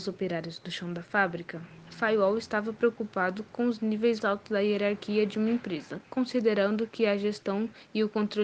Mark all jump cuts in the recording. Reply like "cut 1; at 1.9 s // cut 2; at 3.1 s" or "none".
cut 1; at 4.2 s